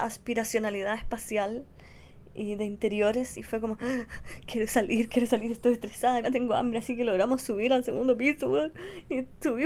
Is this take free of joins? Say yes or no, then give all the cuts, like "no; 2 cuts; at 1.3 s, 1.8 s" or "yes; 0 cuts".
no; 1 cut; at 6.2 s